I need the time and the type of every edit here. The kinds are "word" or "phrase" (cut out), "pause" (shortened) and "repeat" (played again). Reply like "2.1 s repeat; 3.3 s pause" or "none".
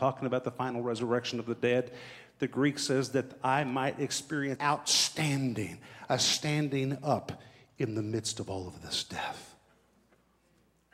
4.6 s word